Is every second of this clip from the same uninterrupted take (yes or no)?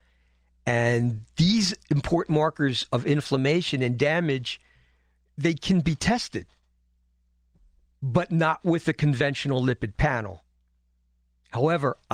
yes